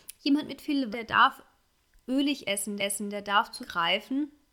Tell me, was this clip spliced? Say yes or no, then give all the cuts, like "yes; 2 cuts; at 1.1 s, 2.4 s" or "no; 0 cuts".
yes; 3 cuts; at 0.9 s, 2.8 s, 3.6 s